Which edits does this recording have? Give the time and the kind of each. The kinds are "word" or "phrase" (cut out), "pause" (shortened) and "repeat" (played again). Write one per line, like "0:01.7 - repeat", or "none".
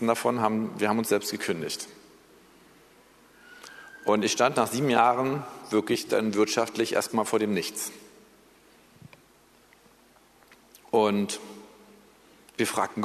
none